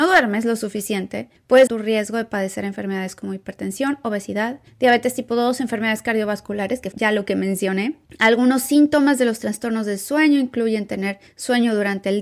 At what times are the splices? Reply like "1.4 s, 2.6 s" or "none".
1.7 s, 6.9 s